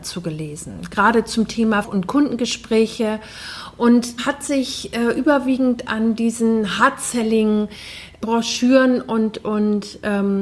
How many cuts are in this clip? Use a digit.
3